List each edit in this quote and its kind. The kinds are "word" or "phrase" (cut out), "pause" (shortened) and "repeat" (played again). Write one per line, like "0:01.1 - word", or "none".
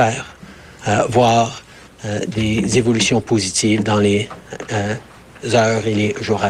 none